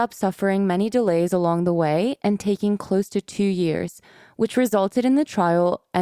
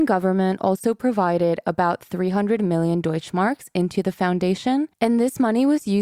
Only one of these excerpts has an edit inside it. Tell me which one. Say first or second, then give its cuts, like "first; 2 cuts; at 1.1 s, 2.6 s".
second; 1 cut; at 4.9 s